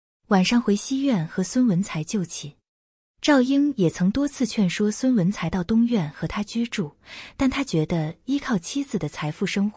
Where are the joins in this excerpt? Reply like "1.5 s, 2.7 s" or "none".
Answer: none